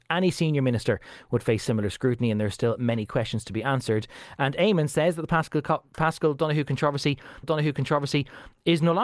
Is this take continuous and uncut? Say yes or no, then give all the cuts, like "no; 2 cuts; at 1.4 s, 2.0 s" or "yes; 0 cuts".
no; 1 cut; at 7.4 s